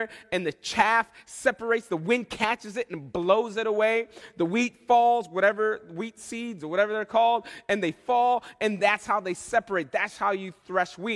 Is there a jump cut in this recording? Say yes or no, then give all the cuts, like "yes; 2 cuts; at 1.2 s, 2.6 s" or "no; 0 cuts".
no; 0 cuts